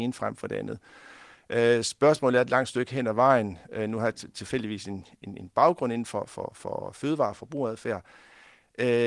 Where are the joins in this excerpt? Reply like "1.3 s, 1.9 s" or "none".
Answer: none